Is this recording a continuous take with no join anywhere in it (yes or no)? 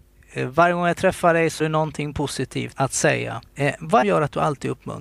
no